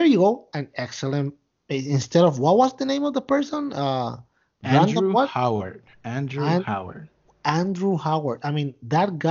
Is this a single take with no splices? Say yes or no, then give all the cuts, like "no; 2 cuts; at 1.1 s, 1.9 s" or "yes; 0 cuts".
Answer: yes; 0 cuts